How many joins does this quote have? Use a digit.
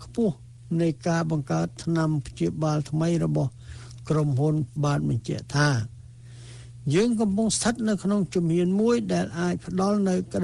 1